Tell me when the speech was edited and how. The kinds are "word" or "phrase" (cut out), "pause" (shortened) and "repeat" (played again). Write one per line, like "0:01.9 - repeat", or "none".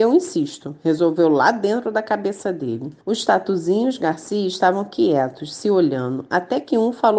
0:03.0 - pause